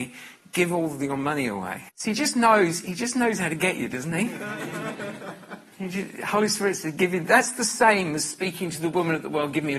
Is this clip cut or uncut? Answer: cut